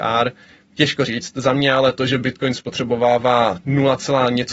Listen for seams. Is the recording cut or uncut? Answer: uncut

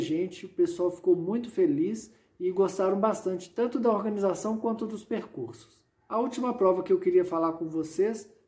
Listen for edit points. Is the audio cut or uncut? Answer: uncut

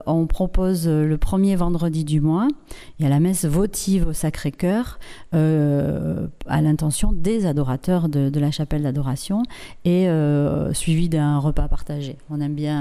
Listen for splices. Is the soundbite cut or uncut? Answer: uncut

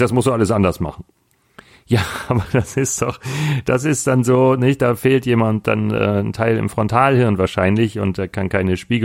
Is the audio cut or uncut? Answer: uncut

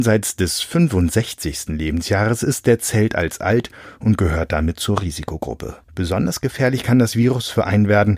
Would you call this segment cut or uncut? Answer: cut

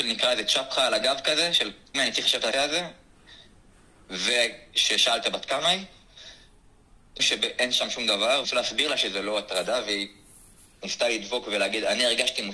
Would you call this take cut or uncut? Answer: cut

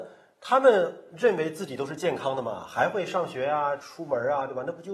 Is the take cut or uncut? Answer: uncut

